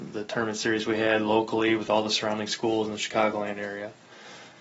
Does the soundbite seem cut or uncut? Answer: uncut